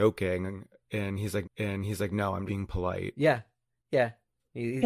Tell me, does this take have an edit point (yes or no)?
yes